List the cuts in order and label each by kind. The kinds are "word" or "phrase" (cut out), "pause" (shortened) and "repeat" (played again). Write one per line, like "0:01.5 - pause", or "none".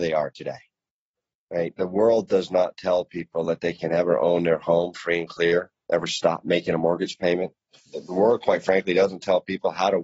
none